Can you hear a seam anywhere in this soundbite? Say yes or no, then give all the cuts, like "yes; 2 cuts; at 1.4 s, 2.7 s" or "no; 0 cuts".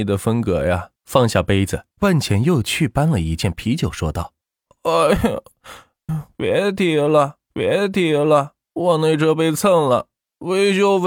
yes; 5 cuts; at 1.0 s, 1.9 s, 4.4 s, 6.1 s, 7.5 s